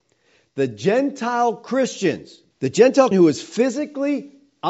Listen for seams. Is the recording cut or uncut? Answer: cut